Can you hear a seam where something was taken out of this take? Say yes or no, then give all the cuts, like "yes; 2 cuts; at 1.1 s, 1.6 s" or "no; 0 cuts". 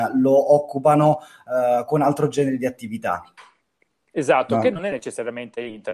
no; 0 cuts